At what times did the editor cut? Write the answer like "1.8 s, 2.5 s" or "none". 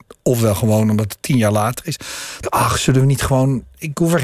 2.4 s